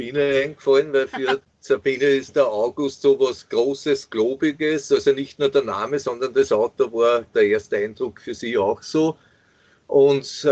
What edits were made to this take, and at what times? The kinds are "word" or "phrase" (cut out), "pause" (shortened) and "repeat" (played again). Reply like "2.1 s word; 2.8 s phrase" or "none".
none